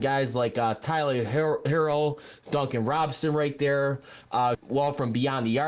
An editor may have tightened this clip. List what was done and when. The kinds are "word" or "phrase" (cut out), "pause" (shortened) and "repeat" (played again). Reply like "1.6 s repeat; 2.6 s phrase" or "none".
4.5 s phrase